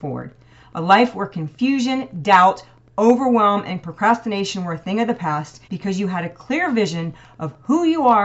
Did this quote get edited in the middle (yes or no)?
yes